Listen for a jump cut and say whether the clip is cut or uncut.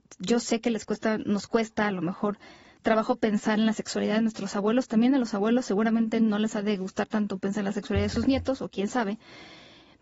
uncut